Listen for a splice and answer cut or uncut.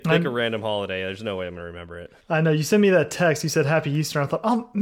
cut